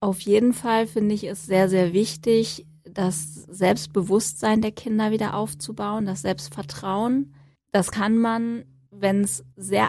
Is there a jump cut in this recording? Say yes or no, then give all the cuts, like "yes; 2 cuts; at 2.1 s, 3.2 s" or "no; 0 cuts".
no; 0 cuts